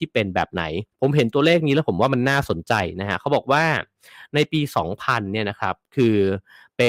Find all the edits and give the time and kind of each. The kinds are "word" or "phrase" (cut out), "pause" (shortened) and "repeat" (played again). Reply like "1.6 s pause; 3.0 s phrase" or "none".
0.9 s pause